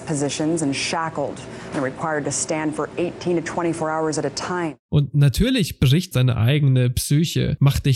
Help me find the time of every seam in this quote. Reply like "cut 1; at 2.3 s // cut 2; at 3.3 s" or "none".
cut 1; at 4.8 s // cut 2; at 6.1 s